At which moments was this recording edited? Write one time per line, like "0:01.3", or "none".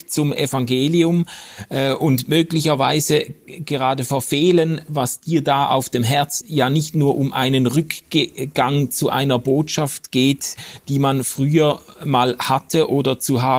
0:06.4